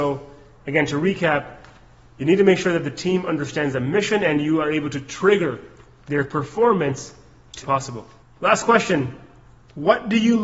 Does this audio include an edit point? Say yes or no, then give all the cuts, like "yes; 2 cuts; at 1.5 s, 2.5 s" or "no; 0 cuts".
yes; 2 cuts; at 7.6 s, 8.2 s